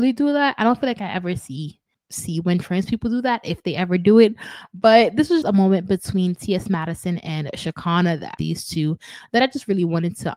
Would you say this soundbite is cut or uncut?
cut